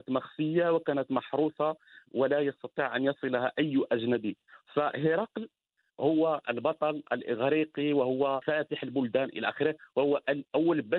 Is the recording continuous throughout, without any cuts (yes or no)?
yes